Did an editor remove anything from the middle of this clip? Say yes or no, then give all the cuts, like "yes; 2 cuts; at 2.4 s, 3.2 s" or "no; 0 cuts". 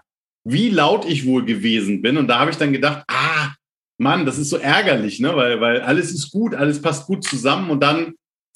no; 0 cuts